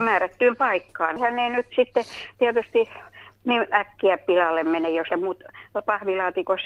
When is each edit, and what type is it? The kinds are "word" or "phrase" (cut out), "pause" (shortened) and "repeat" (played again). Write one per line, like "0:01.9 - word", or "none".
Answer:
0:05.1 - word